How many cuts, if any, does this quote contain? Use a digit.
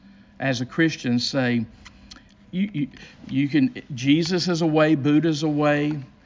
1